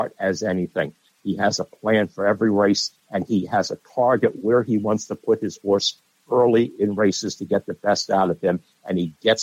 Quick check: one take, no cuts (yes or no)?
yes